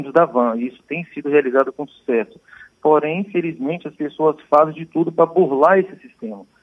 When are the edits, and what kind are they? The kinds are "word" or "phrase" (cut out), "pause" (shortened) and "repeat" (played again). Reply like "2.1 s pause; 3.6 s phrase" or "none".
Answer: none